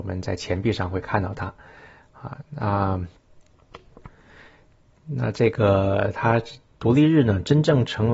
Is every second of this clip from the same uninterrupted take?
yes; 0 cuts

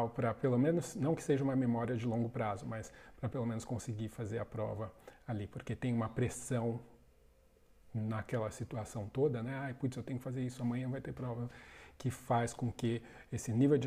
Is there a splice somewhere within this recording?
no; 0 cuts

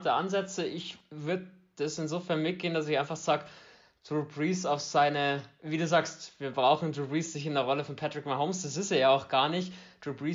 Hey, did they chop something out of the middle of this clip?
no; 0 cuts

